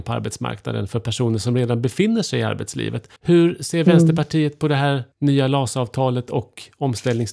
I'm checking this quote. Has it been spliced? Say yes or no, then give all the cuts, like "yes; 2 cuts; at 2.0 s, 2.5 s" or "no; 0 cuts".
yes; 2 cuts; at 3.2 s, 5.1 s